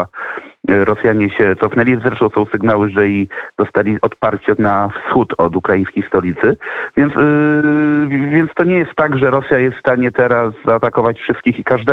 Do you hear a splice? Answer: yes; 1 cut; at 4.6 s

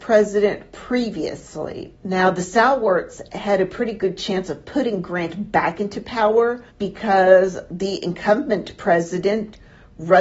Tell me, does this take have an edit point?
yes; 2 cuts; at 2.0 s, 6.7 s

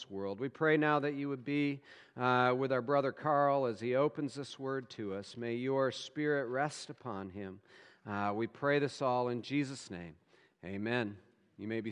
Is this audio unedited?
yes; 0 cuts

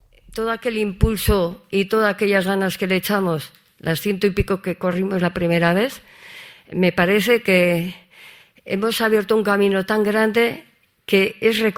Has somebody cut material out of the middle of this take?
no; 0 cuts

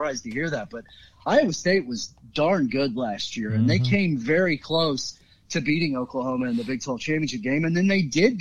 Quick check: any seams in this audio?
no; 0 cuts

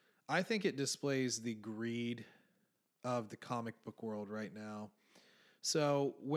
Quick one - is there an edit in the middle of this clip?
no; 0 cuts

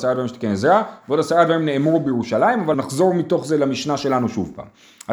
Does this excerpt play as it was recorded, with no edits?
no; 1 cut; at 2.7 s

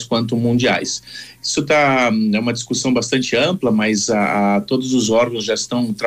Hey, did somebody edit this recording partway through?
no; 0 cuts

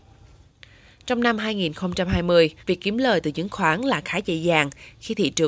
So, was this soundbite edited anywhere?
yes; 1 cut; at 2.6 s

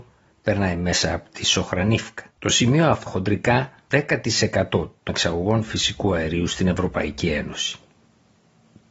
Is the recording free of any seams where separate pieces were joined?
no; 4 cuts; at 2.3 s, 3.1 s, 3.9 s, 5.1 s

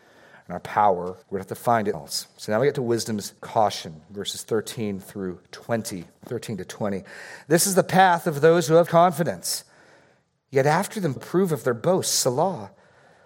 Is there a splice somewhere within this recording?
yes; 6 cuts; at 1.2 s, 1.9 s, 3.4 s, 6.1 s, 8.9 s, 11.2 s

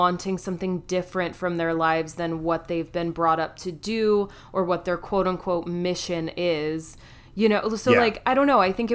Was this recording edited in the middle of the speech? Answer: no; 0 cuts

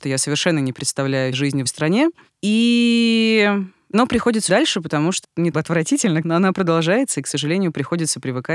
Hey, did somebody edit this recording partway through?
yes; 6 cuts; at 1.3 s, 1.7 s, 4.5 s, 5.2 s, 5.5 s, 6.2 s

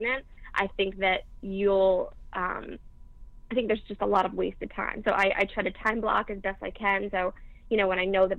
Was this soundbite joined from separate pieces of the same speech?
no; 0 cuts

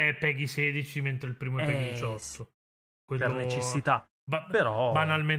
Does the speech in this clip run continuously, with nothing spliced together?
yes; 0 cuts

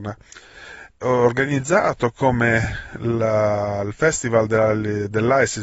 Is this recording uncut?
no; 1 cut; at 1.0 s

